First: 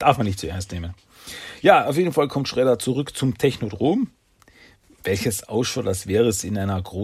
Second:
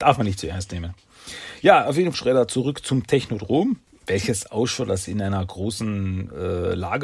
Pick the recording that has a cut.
second; 3 cuts; at 2.1 s, 3.9 s, 5.1 s

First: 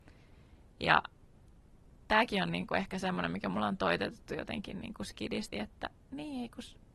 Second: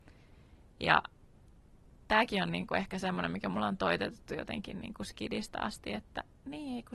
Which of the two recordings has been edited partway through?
first; 1 cut; at 5.5 s

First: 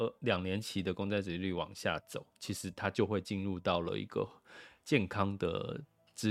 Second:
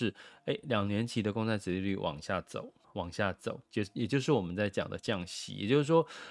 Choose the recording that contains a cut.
second; 1 cut; at 2.8 s

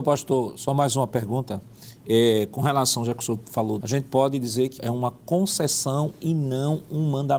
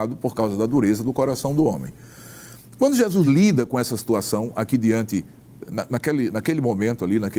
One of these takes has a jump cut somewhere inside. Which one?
first; 2 cuts; at 3.8 s, 4.8 s

